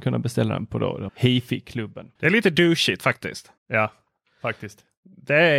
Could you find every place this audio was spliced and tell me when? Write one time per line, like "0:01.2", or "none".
0:01.1
0:02.2
0:03.6